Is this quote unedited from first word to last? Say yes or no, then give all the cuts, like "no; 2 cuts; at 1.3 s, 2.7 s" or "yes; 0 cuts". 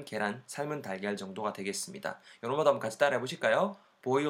yes; 0 cuts